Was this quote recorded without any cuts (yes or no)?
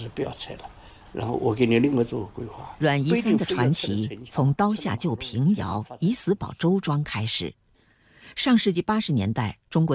yes